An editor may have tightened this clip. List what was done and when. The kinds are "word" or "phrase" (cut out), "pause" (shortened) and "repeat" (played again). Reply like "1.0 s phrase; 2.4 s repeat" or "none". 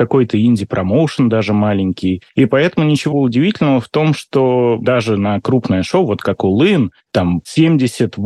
3.1 s word